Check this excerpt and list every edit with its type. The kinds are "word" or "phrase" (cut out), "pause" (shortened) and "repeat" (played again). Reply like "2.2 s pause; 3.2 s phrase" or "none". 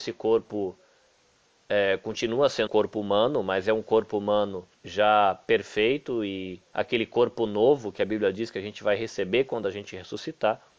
2.7 s word; 4.7 s pause; 6.7 s pause